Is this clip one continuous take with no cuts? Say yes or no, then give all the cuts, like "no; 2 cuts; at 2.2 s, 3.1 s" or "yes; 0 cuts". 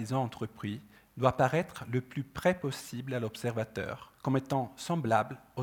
no; 1 cut; at 4.2 s